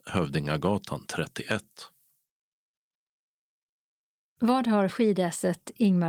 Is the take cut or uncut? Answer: uncut